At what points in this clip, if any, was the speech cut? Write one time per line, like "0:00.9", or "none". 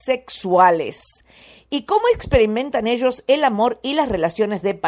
none